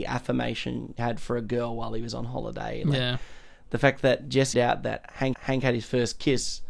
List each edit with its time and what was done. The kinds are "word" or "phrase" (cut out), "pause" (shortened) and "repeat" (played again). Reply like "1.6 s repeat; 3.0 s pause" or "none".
1.0 s word; 4.5 s phrase; 5.3 s repeat